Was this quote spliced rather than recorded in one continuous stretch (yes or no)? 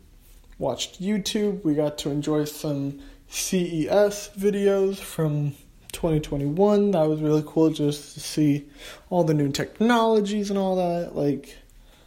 no